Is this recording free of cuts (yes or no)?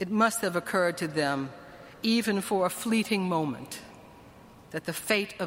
yes